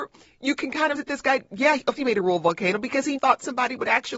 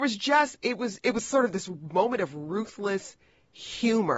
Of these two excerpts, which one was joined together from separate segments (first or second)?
first